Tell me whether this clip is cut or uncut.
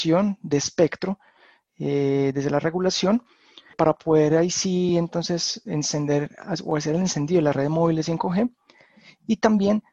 uncut